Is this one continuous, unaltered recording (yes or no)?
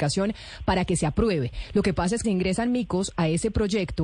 no